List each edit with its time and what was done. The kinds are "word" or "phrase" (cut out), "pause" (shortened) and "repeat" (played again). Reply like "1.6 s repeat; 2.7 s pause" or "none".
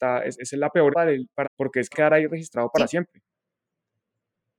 0.9 s word; 1.4 s word; 1.9 s word